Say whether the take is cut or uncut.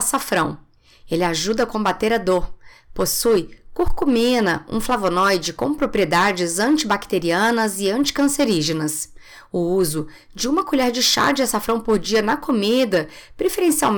uncut